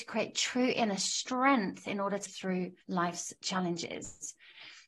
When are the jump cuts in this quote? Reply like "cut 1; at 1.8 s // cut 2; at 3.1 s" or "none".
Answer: cut 1; at 2.3 s // cut 2; at 2.8 s